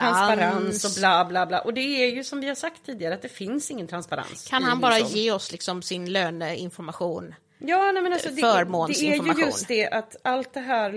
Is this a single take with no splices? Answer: yes; 0 cuts

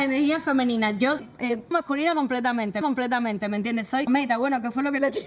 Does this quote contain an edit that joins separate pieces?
yes; 4 cuts; at 1.2 s, 1.7 s, 2.8 s, 4.1 s

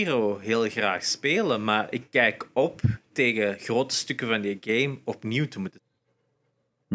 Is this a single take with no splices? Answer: yes; 0 cuts

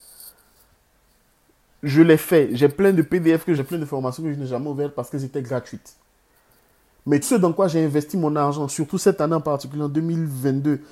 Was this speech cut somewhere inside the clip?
yes; 2 cuts; at 3.6 s, 7.2 s

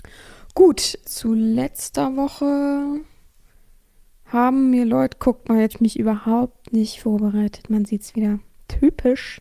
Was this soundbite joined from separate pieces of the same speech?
yes; 2 cuts; at 1.0 s, 5.7 s

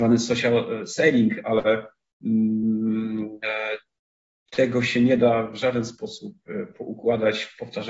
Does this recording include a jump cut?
no; 0 cuts

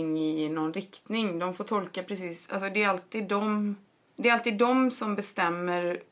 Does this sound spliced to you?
no; 0 cuts

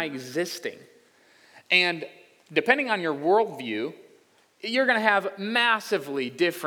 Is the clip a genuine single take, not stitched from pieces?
yes; 0 cuts

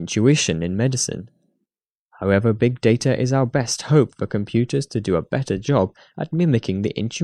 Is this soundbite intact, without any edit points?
yes; 0 cuts

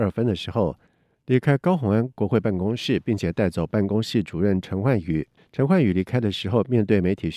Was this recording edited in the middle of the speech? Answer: yes; 1 cut; at 5.4 s

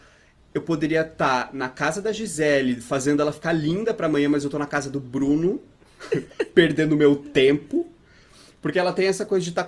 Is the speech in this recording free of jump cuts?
yes; 0 cuts

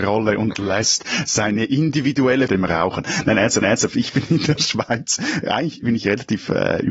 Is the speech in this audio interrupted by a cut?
yes; 2 cuts; at 2.5 s, 3.6 s

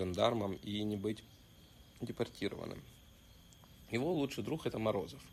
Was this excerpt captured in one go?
yes; 0 cuts

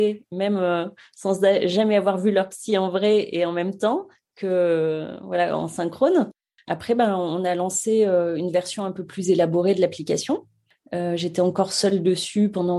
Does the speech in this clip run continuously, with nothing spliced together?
yes; 0 cuts

